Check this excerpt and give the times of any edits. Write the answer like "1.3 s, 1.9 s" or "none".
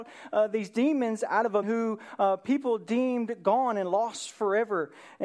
1.6 s